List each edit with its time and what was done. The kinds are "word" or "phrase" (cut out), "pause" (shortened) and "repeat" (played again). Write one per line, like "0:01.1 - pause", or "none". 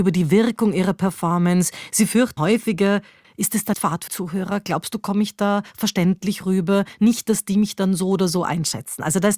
0:02.4 - word
0:03.2 - word
0:03.7 - word
0:04.1 - word